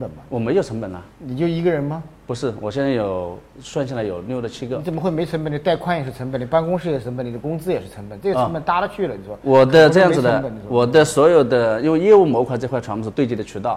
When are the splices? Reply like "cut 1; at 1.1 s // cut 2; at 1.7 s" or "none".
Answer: cut 1; at 1.1 s // cut 2; at 3.5 s